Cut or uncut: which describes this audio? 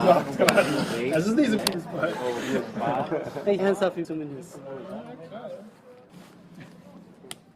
cut